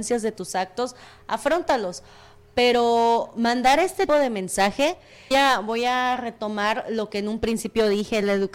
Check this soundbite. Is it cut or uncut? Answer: cut